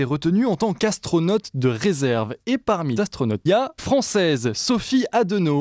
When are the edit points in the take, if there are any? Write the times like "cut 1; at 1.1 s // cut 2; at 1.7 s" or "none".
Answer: cut 1; at 3.0 s // cut 2; at 3.5 s // cut 3; at 3.8 s